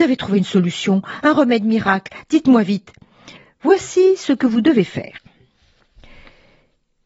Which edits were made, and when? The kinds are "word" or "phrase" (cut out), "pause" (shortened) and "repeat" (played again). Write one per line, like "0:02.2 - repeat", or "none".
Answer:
0:03.4 - pause